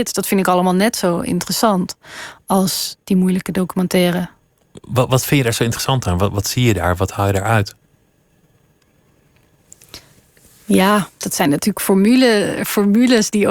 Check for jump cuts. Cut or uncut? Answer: uncut